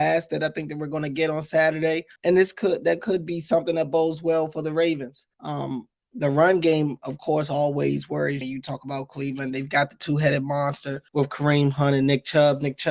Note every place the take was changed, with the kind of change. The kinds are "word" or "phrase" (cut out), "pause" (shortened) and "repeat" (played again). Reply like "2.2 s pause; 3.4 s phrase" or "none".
2.2 s pause; 5.3 s pause; 8.4 s phrase; 11.1 s pause